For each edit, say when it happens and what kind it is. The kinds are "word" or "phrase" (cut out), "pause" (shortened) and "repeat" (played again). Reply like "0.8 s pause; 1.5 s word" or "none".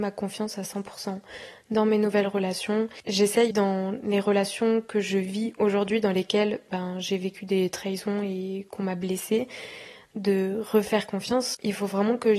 3.5 s word